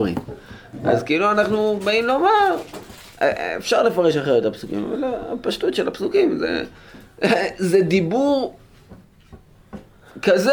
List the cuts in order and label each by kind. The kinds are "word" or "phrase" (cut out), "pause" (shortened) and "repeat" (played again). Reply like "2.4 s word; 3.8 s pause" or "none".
none